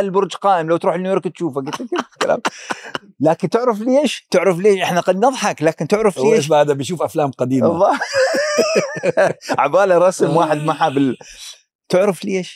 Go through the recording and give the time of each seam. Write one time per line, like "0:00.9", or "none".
none